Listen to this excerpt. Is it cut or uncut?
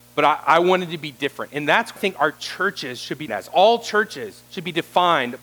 cut